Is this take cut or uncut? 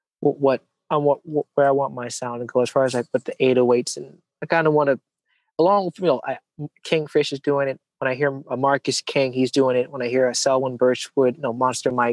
uncut